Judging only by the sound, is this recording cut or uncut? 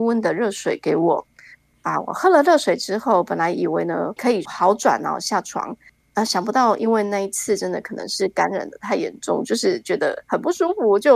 cut